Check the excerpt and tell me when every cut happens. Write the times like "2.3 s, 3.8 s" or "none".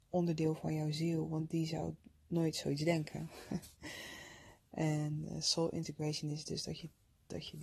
3.7 s